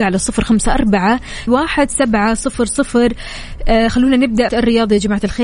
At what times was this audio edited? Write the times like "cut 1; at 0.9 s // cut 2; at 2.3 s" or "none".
cut 1; at 1.5 s // cut 2; at 4.5 s